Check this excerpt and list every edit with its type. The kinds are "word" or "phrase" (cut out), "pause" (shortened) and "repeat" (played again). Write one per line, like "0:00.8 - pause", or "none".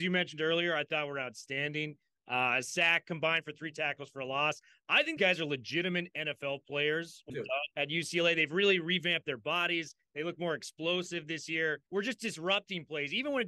0:05.2 - word
0:07.3 - phrase
0:07.7 - pause
0:11.9 - pause